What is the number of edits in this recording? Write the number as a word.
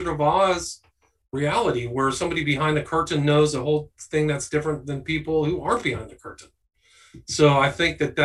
zero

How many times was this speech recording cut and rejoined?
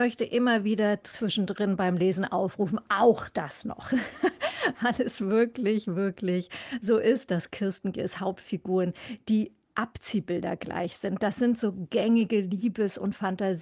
zero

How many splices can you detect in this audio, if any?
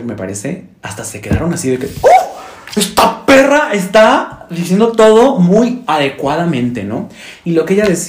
zero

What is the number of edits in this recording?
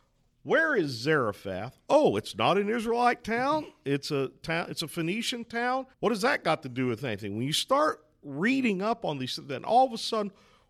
one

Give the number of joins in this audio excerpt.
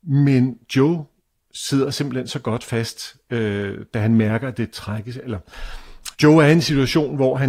two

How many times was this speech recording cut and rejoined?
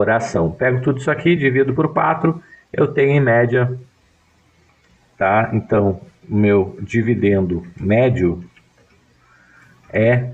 zero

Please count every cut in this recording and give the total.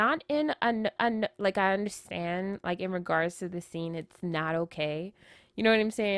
one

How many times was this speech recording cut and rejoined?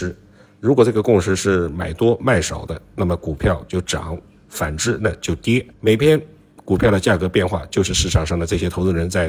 one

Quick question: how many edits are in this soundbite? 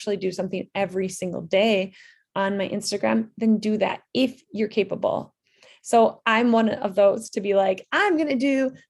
zero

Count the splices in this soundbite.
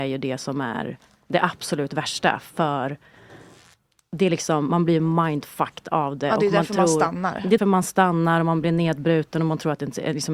one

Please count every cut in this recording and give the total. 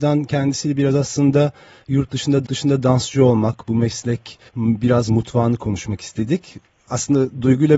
two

